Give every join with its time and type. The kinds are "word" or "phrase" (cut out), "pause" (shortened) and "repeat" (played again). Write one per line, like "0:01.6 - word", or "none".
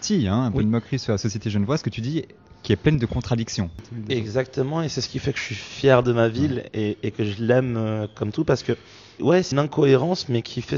0:09.2 - word
0:09.5 - word

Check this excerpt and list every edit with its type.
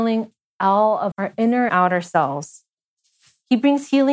0:01.1 - word
0:01.7 - word

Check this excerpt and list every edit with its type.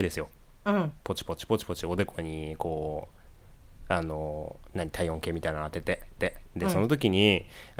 0:01.0 - pause
0:06.2 - repeat

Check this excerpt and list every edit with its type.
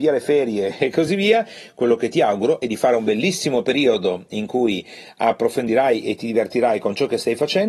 none

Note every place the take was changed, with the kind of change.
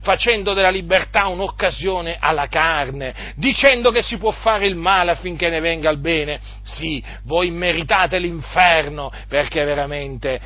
none

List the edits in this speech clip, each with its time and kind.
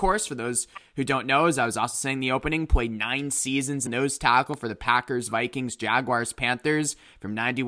0:03.9 - phrase

